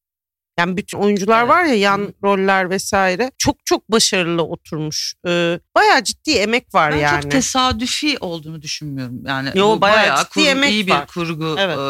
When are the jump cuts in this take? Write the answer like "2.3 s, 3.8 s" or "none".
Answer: 0.9 s, 3.3 s, 5.7 s

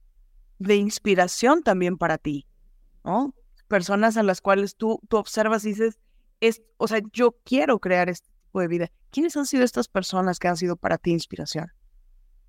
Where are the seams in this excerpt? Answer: none

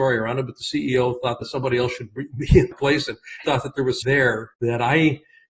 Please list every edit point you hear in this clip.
1.4 s, 2.7 s, 3.4 s, 4.0 s, 4.5 s

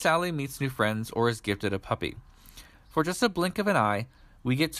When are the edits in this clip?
none

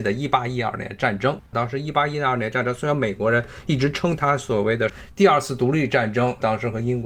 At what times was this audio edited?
1.5 s

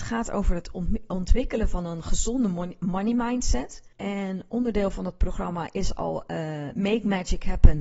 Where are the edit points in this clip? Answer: 3.9 s

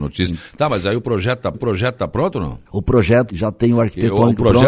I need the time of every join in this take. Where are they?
1.5 s, 2.7 s, 3.3 s

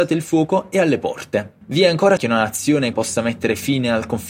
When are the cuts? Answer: 1.6 s, 2.2 s, 2.9 s

